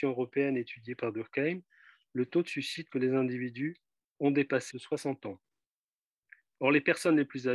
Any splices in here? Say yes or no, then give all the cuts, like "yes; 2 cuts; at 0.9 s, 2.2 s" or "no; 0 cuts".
yes; 2 cuts; at 2.9 s, 4.7 s